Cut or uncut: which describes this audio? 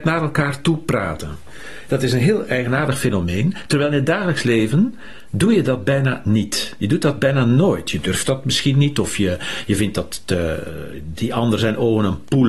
uncut